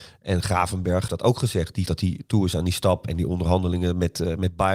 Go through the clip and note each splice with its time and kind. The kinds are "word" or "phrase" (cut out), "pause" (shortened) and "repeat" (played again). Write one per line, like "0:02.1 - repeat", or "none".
0:01.1 - word
0:01.9 - word

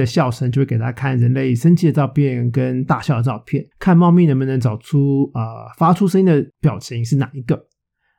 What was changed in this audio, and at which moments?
0:03.7 - pause
0:06.5 - pause

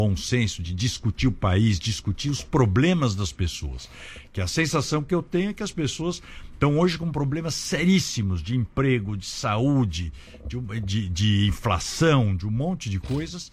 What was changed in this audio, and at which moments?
none

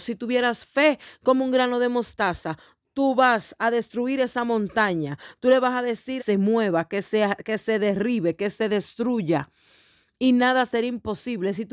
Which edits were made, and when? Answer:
0:06.2 - phrase

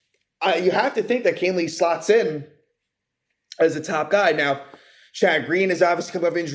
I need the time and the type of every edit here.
none

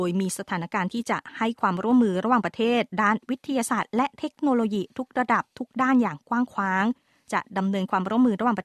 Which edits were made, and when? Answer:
none

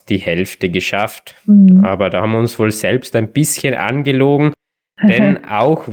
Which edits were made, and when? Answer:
none

